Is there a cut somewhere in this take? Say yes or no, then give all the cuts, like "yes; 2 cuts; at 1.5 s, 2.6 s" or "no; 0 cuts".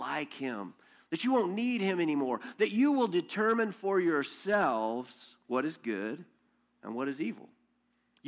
no; 0 cuts